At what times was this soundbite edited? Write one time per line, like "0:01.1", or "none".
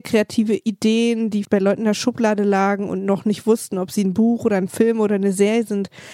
0:01.4